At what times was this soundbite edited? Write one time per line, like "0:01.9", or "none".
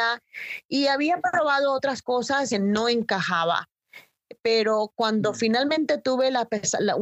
0:02.5